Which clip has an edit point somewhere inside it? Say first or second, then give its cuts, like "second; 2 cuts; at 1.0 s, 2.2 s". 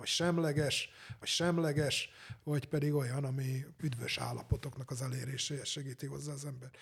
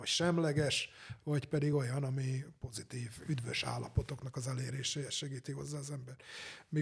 first; 2 cuts; at 1.2 s, 3.8 s